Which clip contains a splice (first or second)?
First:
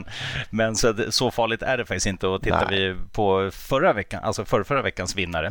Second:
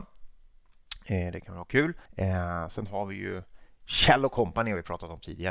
second